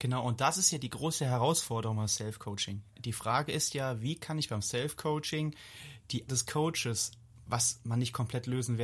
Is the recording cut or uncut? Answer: cut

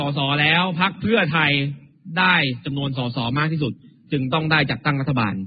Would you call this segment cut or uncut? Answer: uncut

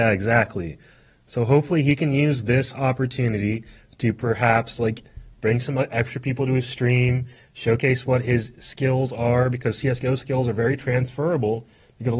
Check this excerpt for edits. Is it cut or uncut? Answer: uncut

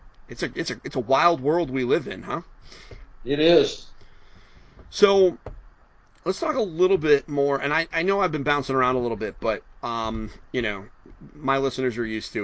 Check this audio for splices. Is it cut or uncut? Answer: uncut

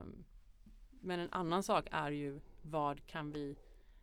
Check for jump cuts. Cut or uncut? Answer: uncut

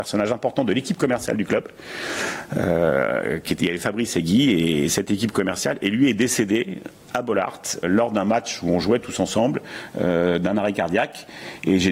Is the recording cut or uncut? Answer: cut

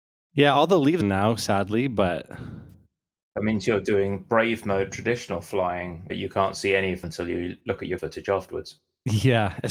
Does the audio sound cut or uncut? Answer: cut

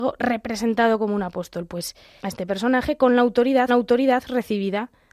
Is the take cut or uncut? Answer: cut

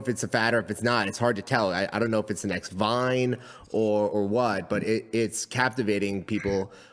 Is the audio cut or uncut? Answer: uncut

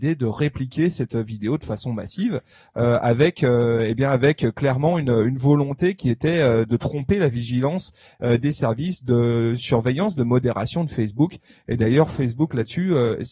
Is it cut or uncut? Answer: uncut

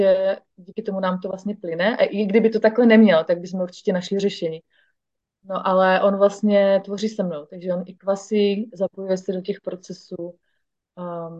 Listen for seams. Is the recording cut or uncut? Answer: uncut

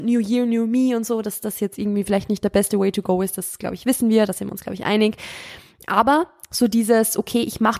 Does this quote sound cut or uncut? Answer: uncut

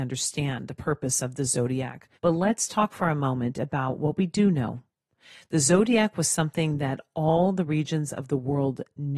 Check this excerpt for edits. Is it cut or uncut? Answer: cut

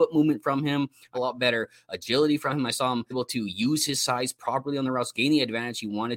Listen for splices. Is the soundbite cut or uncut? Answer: cut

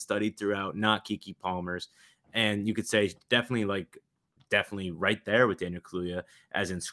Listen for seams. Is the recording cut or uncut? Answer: uncut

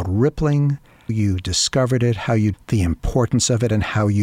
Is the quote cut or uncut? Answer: cut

